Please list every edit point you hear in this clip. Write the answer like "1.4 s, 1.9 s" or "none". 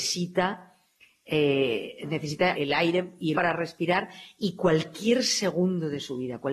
2.5 s, 3.3 s